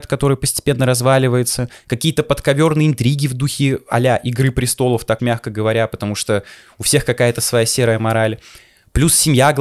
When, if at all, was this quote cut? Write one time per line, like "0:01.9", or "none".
0:05.2